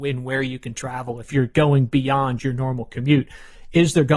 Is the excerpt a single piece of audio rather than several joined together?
no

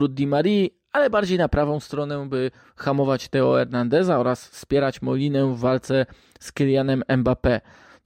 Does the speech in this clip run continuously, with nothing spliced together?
yes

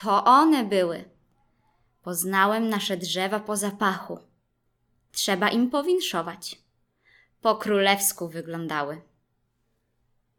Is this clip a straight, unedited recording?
yes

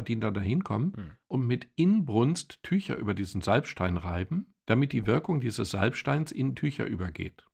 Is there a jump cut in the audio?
yes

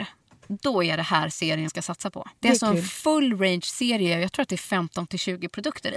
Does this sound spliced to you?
yes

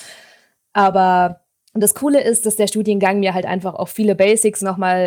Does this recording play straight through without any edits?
no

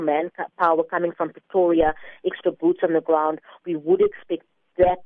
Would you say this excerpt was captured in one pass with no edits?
yes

